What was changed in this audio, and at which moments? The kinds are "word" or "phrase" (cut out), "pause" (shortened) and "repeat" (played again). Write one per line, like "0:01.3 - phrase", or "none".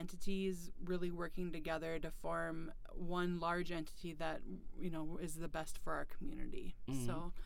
none

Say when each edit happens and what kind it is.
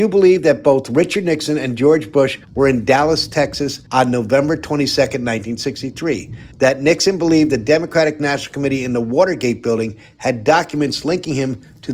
0:02.4 - pause
0:03.9 - pause
0:06.5 - pause

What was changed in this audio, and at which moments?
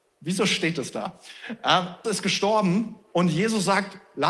0:02.0 - word

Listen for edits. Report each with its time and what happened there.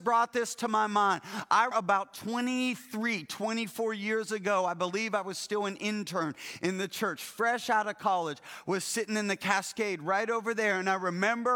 0:01.7 - word

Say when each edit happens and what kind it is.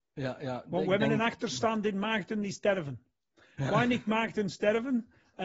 none

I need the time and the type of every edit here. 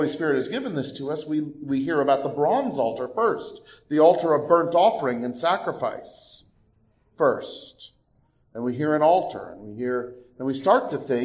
none

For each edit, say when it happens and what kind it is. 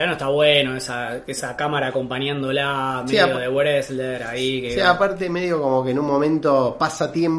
none

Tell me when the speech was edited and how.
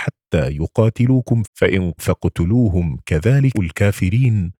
0:01.4 - word
0:02.0 - word
0:03.5 - word

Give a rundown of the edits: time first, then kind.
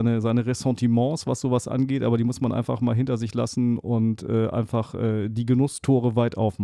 none

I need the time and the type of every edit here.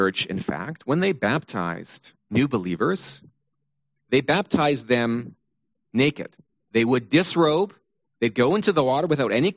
none

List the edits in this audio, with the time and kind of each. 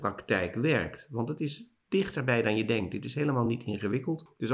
none

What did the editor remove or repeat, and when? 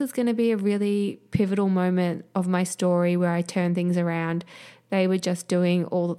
none

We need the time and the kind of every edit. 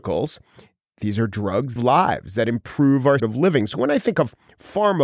0:01.8 - phrase
0:03.2 - word

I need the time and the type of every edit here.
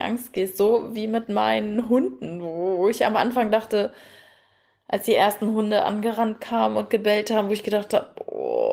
none

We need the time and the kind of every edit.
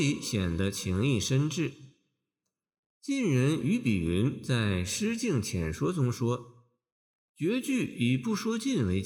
none

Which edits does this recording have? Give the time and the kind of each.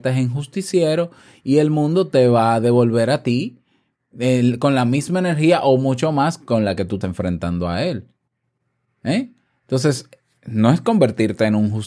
0:07.0 - word

